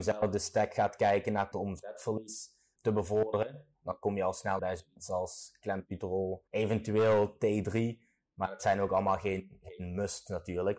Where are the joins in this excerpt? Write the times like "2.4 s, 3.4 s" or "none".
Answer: 1.5 s, 2.8 s, 4.6 s, 6.5 s